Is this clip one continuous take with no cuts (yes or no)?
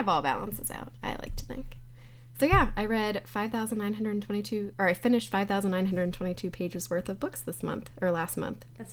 yes